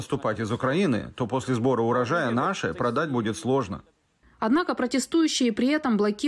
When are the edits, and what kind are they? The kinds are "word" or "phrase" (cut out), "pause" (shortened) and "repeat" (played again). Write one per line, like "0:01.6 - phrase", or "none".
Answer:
none